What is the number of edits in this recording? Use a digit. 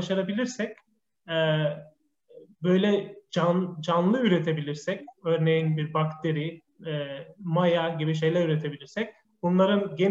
0